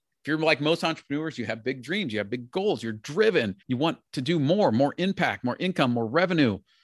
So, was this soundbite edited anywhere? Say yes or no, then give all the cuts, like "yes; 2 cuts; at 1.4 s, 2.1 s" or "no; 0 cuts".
yes; 2 cuts; at 3.6 s, 4.1 s